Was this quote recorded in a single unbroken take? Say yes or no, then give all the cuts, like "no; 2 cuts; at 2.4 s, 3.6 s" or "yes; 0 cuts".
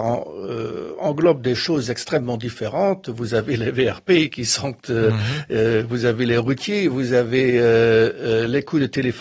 yes; 0 cuts